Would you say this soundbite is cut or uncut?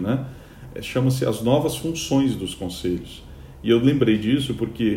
uncut